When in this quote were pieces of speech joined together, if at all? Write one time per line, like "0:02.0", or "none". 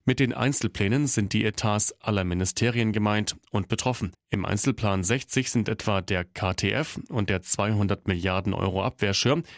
0:04.1